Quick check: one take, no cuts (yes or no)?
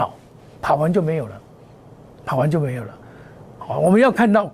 yes